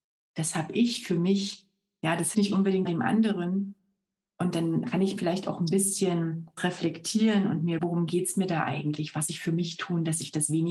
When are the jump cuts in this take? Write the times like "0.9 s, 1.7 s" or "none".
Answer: 2.3 s, 2.9 s, 4.8 s, 5.2 s, 6.6 s, 7.8 s, 9.3 s